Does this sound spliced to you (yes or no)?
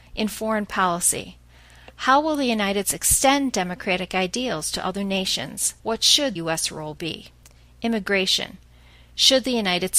yes